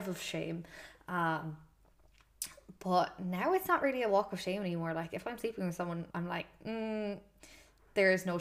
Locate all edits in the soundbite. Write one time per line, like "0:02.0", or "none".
0:06.1